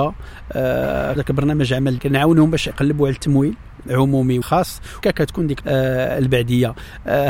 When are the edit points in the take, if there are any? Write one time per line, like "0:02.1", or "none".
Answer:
0:01.2
0:02.0
0:02.7
0:03.8
0:04.4
0:05.0
0:05.6